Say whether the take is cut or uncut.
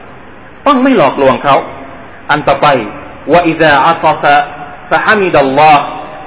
uncut